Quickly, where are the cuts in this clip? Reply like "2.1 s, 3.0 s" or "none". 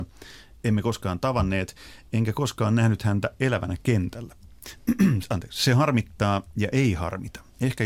none